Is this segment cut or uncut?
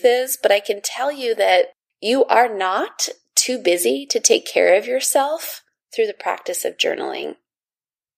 uncut